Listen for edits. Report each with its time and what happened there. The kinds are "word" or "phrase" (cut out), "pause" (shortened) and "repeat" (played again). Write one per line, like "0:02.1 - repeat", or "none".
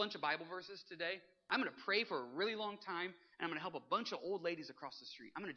none